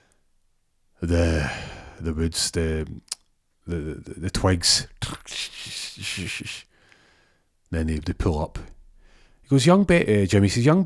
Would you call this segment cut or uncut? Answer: uncut